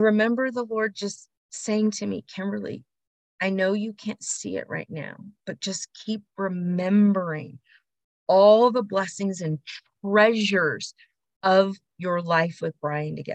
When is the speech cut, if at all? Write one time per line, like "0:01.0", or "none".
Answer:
0:03.2